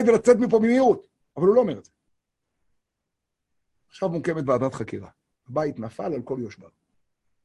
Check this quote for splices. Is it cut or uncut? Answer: uncut